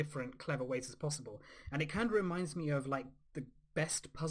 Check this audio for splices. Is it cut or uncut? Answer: uncut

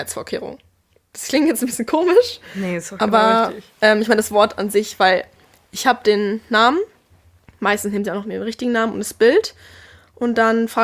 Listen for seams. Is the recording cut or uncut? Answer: uncut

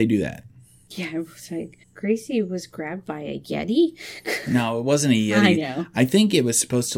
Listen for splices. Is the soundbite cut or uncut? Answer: cut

